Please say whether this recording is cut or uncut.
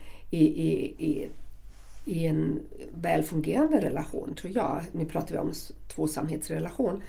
uncut